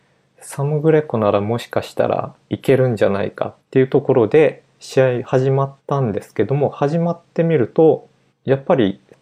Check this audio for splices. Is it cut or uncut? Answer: cut